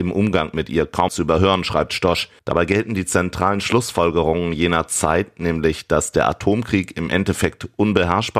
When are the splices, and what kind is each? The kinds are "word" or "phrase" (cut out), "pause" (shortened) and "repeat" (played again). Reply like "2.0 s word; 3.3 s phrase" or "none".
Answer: 1.1 s word; 2.4 s pause

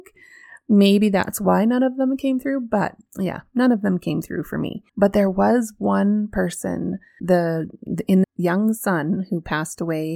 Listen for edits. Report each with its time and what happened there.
4.9 s pause; 7.2 s word; 8.2 s phrase

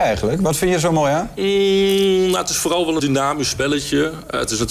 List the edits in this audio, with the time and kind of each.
3.0 s word

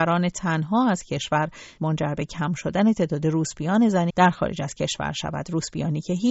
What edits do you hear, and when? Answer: 1.8 s word; 4.1 s word

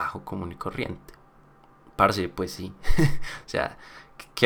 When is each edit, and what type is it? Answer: none

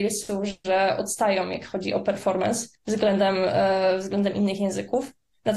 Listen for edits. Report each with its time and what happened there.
2.7 s pause

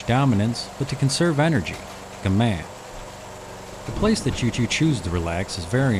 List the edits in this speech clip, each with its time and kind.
2.2 s word; 4.5 s repeat

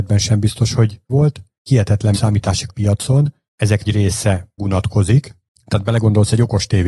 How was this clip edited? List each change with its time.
1.1 s word; 2.1 s word; 2.7 s phrase; 3.8 s word; 4.6 s word

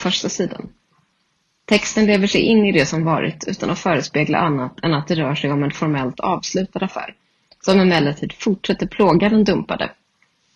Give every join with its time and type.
none

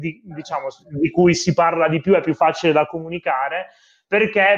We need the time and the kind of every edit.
none

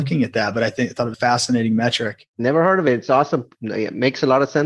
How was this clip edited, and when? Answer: 1.1 s word

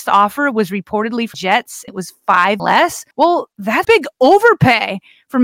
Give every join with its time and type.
1.3 s word; 1.9 s word; 2.6 s word; 3.1 s pause; 3.8 s word

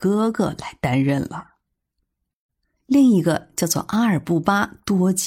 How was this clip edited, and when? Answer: none

